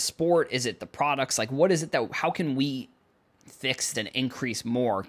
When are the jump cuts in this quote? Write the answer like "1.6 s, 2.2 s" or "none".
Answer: 3.9 s